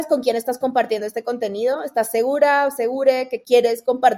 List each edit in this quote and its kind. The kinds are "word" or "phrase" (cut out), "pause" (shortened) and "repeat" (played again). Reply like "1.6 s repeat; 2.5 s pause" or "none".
none